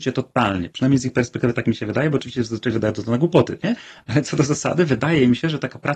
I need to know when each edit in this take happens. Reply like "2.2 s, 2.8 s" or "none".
none